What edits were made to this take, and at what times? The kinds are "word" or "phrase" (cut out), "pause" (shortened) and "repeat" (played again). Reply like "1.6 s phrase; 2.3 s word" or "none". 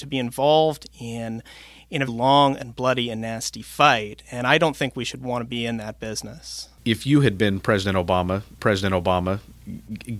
2.1 s word; 8.6 s repeat